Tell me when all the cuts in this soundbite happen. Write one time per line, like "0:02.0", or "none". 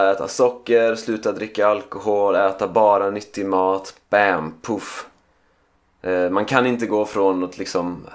none